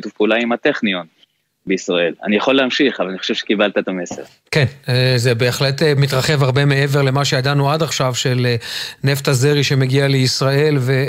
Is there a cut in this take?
no; 0 cuts

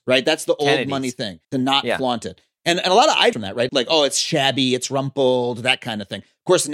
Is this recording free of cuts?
no; 3 cuts; at 1.4 s, 3.3 s, 3.7 s

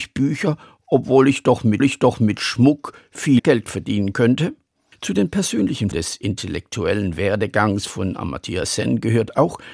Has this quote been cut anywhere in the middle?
yes; 4 cuts; at 1.8 s, 3.4 s, 4.7 s, 5.9 s

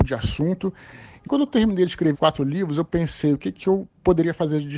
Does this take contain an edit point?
yes; 2 cuts; at 1.3 s, 2.1 s

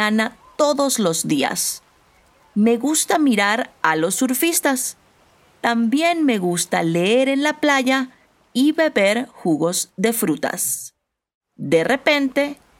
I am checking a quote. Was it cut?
no; 0 cuts

